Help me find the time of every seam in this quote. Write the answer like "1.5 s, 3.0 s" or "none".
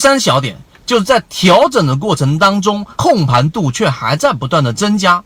2.9 s